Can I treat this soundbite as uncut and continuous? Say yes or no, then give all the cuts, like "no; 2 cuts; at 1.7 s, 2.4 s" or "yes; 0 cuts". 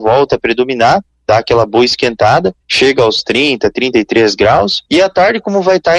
no; 2 cuts; at 2.6 s, 4.9 s